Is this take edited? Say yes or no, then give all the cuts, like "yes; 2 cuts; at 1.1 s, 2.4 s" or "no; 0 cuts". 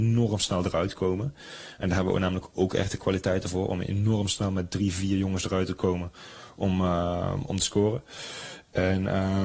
no; 0 cuts